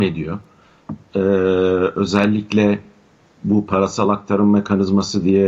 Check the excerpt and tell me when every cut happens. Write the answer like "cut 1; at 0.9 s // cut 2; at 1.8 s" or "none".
none